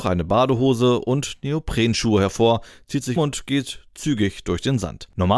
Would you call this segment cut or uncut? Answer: cut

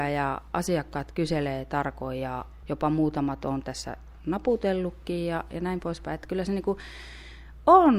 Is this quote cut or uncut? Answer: uncut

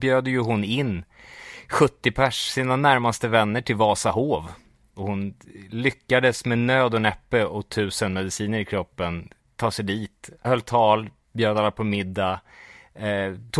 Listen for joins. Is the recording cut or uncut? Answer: uncut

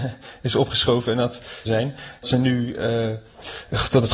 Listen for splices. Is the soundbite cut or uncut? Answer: cut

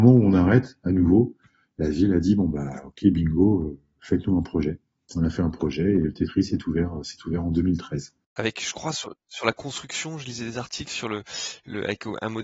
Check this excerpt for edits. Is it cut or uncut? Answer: uncut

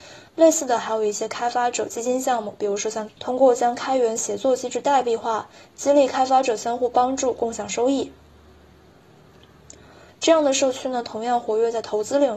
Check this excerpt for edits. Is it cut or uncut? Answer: cut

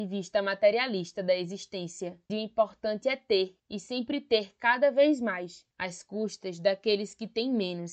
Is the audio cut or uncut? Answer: cut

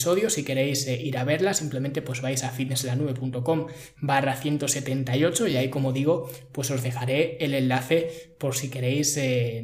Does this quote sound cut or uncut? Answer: uncut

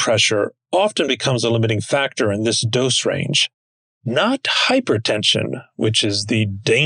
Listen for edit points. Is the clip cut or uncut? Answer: uncut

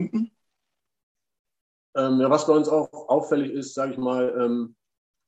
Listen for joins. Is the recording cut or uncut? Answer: uncut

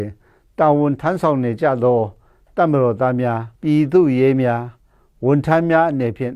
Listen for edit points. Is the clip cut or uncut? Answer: cut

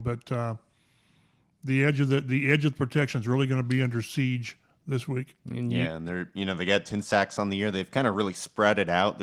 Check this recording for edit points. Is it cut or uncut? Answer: uncut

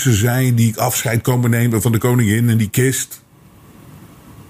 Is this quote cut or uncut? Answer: uncut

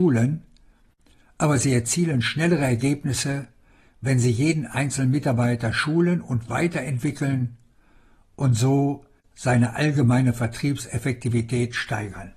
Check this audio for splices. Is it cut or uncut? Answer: uncut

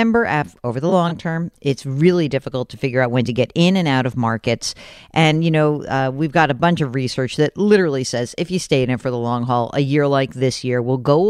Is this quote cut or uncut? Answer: uncut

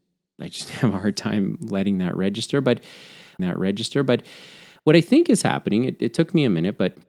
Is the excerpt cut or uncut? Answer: cut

